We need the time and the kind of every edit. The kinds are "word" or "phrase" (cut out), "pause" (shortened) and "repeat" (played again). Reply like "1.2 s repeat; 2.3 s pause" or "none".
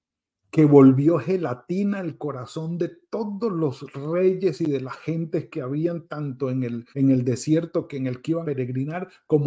6.9 s pause; 8.4 s word